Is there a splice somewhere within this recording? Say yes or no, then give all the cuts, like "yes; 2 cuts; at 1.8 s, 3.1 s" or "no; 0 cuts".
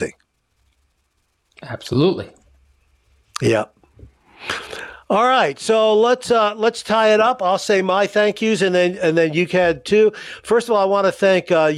no; 0 cuts